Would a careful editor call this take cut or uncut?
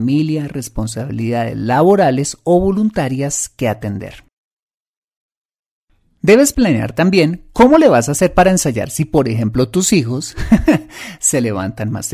uncut